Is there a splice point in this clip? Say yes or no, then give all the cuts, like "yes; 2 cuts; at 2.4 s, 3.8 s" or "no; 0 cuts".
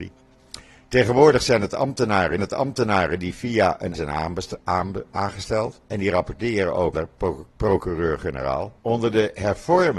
yes; 5 cuts; at 2.4 s, 3.9 s, 5.9 s, 6.9 s, 8.8 s